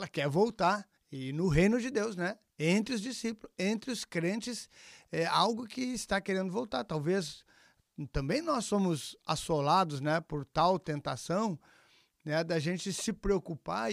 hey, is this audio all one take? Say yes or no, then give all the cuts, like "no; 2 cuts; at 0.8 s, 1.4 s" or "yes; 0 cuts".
no; 2 cuts; at 1.0 s, 2.5 s